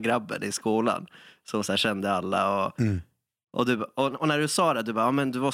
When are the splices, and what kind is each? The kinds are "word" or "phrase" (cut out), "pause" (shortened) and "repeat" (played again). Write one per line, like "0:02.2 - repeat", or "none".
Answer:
none